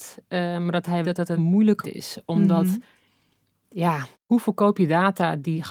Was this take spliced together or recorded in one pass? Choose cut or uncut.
cut